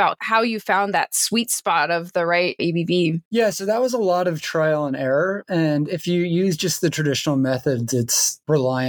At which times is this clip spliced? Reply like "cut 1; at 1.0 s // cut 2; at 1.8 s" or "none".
none